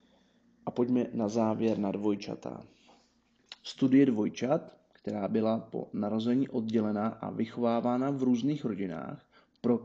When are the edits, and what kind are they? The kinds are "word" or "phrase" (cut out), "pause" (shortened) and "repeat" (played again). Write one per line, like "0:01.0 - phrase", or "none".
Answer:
none